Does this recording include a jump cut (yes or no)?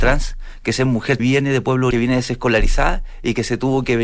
yes